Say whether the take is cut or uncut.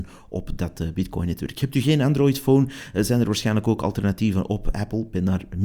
uncut